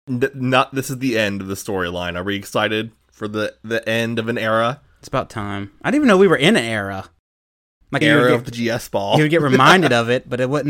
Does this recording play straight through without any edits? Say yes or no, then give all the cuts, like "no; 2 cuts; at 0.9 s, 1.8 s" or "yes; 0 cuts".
no; 2 cuts; at 3.0 s, 8.0 s